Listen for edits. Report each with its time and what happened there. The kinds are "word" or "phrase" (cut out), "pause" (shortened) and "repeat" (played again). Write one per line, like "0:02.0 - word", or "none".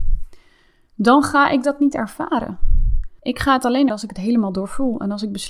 0:03.2 - pause
0:03.9 - word